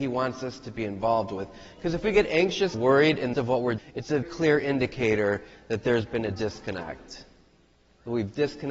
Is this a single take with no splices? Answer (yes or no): no